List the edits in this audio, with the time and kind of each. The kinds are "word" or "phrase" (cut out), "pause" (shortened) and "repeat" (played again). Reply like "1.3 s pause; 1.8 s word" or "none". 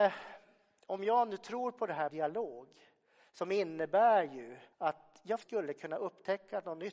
2.1 s word; 4.7 s pause; 5.4 s word